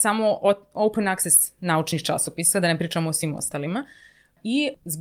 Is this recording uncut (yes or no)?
yes